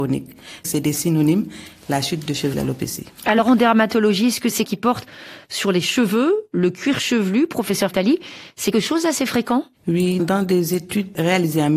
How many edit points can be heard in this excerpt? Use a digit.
5